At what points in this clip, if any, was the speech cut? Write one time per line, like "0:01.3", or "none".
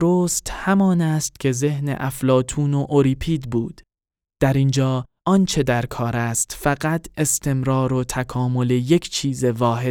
none